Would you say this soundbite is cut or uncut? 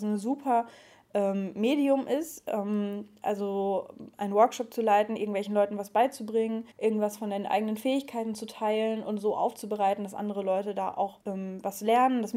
cut